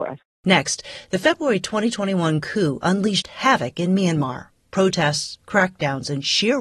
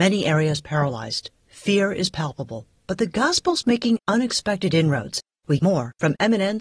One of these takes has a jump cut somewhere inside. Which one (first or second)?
second